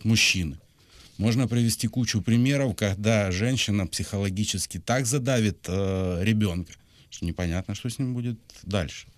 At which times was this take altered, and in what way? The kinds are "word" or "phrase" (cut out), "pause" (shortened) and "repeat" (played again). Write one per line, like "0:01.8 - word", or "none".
none